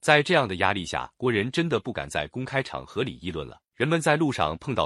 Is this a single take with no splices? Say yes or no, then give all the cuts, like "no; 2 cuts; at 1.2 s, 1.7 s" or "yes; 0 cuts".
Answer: no; 2 cuts; at 1.1 s, 3.7 s